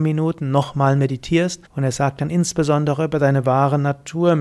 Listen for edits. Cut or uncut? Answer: cut